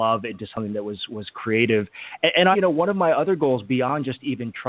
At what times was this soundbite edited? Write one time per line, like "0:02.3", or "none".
0:02.5